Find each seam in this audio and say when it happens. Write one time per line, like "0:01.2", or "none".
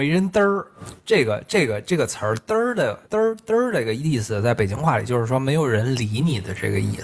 0:03.0